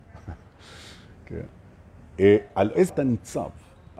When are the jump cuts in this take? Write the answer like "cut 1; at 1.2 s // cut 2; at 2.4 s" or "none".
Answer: cut 1; at 2.9 s